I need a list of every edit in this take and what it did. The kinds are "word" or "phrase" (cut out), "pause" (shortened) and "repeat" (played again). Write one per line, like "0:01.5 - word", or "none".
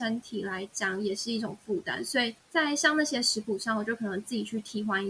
0:02.4 - pause